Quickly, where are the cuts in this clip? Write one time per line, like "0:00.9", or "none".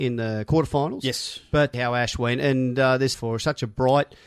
0:01.7
0:03.1